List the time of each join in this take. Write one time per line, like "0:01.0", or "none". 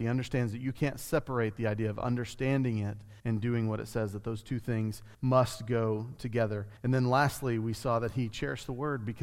0:03.2
0:05.1
0:06.8